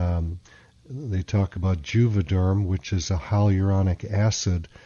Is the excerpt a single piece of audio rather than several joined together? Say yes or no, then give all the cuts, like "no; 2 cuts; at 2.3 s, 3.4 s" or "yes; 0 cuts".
yes; 0 cuts